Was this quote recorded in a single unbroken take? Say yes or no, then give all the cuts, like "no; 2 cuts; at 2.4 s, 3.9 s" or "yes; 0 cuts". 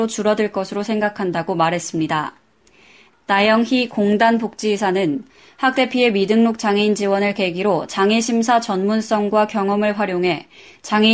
yes; 0 cuts